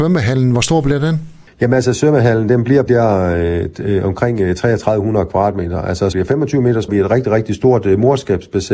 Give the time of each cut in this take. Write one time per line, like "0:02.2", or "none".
0:01.5
0:02.9
0:06.1
0:06.9